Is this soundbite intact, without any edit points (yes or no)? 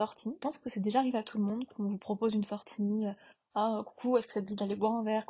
yes